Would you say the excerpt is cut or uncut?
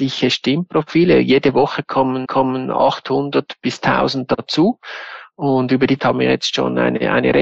cut